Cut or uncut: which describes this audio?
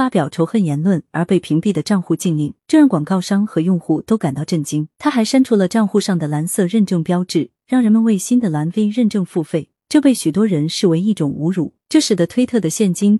cut